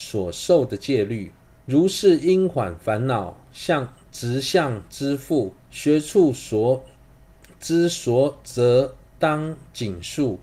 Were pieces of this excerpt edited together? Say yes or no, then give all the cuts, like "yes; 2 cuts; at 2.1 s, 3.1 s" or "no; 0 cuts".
yes; 2 cuts; at 1.4 s, 5.6 s